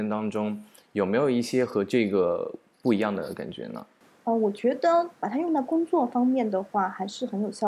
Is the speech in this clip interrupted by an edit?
yes; 2 cuts; at 4.0 s, 5.1 s

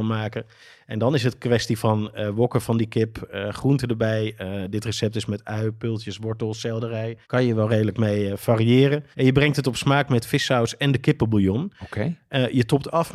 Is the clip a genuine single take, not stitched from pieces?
no; 2 cuts; at 7.2 s, 9.1 s

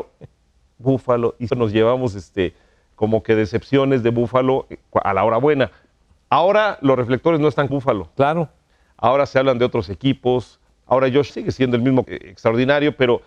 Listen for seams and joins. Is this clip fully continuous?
no; 4 cuts; at 1.5 s, 7.7 s, 11.3 s, 12.0 s

